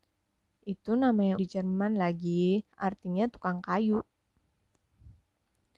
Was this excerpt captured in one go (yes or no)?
no